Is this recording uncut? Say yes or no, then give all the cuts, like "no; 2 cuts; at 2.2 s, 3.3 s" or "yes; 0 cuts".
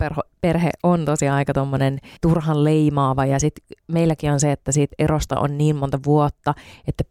yes; 0 cuts